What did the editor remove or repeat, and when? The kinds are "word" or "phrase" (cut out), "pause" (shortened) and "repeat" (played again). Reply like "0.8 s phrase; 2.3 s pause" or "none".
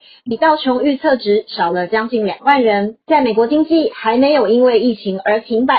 3.0 s pause